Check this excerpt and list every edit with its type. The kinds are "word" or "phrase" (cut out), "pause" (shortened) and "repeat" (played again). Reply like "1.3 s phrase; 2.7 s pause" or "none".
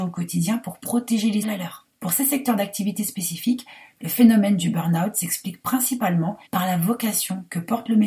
1.4 s phrase; 6.5 s pause